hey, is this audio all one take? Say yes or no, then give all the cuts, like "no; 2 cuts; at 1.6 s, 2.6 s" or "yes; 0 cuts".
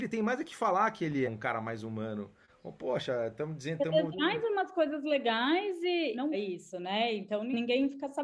no; 3 cuts; at 1.2 s, 4.1 s, 6.3 s